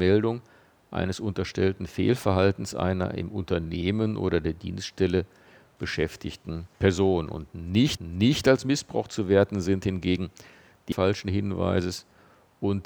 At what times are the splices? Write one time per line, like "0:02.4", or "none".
0:06.7
0:08.0
0:10.9